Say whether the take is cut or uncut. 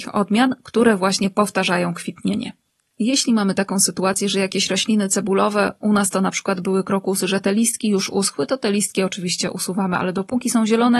uncut